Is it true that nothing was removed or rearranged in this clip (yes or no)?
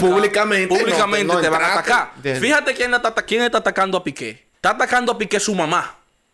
no